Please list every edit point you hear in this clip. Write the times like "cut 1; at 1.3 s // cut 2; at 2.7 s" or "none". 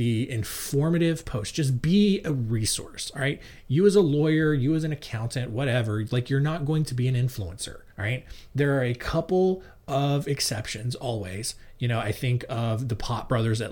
cut 1; at 7.9 s

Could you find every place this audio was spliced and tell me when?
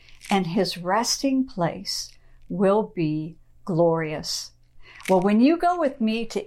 none

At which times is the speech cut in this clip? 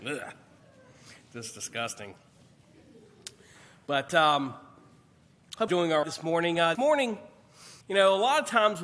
cut 1; at 5.7 s // cut 2; at 6.0 s // cut 3; at 6.7 s // cut 4; at 7.8 s

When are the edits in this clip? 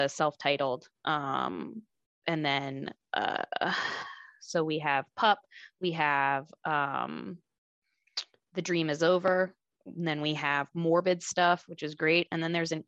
none

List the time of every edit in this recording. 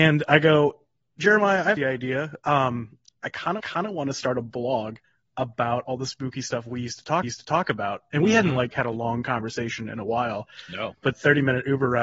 cut 1; at 1.8 s // cut 2; at 3.6 s // cut 3; at 5.0 s // cut 4; at 7.2 s // cut 5; at 8.7 s // cut 6; at 11.1 s

